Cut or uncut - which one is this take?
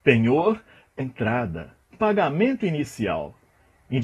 cut